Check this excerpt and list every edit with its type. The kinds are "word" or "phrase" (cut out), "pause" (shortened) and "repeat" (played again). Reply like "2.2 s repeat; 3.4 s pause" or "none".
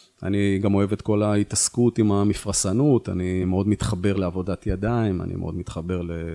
none